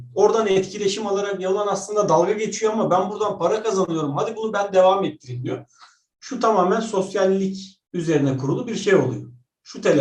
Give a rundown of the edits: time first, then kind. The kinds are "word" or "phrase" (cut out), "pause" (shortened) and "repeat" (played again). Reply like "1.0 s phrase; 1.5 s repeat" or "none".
7.9 s pause